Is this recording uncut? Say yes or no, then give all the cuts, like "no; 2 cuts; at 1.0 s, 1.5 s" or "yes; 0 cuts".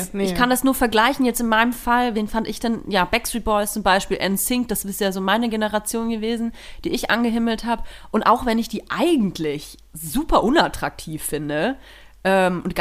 yes; 0 cuts